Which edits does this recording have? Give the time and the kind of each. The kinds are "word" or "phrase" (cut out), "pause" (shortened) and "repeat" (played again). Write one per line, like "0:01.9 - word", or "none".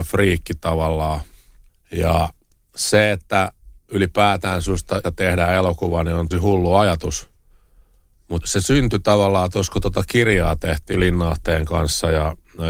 0:01.7 - pause
0:03.8 - pause
0:05.0 - word
0:06.3 - word
0:08.4 - word
0:10.9 - word